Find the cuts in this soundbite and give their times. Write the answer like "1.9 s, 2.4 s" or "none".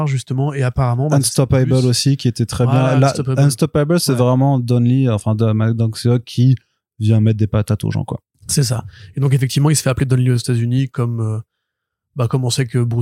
none